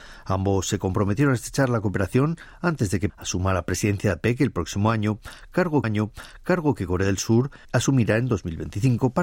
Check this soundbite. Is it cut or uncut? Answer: cut